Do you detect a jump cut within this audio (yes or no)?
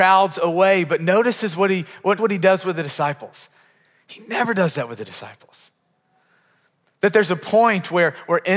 yes